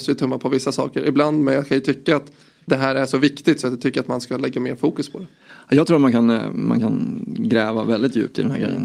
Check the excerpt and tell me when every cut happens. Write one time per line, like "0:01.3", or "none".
none